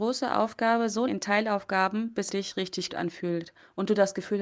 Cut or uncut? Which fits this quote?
cut